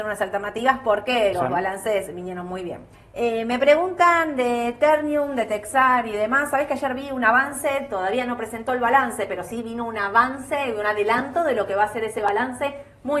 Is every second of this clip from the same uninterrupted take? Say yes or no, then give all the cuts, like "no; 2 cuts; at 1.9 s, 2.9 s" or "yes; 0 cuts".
no; 2 cuts; at 1.3 s, 2.9 s